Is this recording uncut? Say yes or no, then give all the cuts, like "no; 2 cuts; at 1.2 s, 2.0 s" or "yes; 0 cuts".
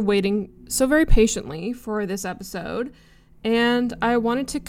yes; 0 cuts